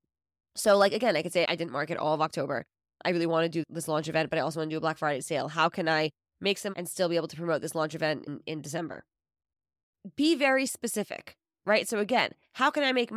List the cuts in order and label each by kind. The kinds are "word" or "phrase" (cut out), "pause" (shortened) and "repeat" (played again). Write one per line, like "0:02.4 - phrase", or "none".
0:06.7 - word